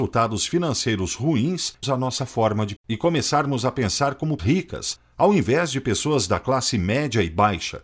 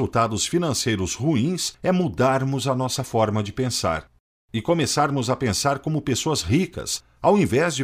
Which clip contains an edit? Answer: first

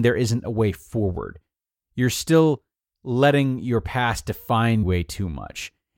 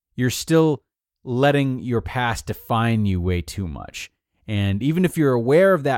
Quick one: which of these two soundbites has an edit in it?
first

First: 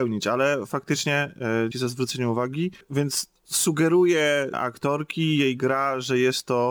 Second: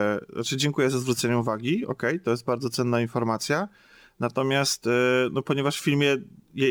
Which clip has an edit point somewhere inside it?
first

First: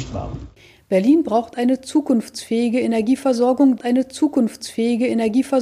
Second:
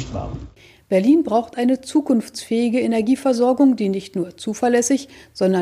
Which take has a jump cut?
first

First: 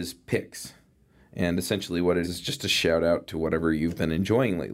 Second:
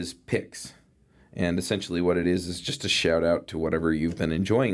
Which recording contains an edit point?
first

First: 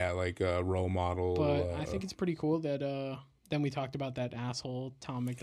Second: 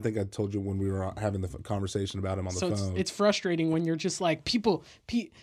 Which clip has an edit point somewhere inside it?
first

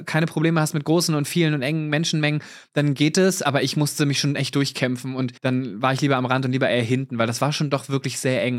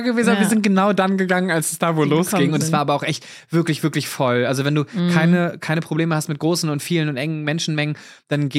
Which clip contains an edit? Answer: first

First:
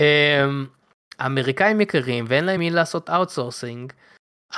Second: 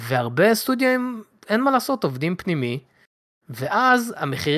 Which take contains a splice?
first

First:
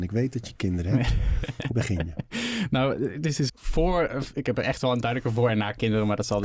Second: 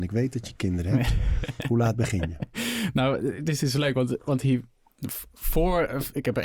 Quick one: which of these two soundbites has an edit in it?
first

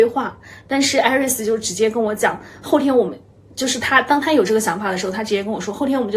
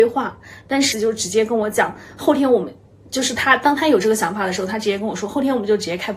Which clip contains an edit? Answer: second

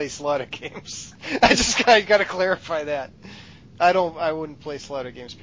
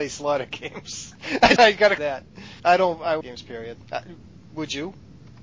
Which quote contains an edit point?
second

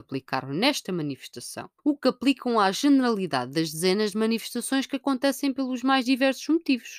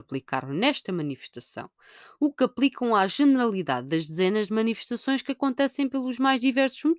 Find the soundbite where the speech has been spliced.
first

